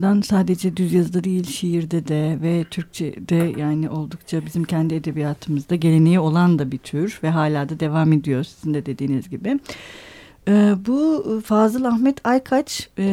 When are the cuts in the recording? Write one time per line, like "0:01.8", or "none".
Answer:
none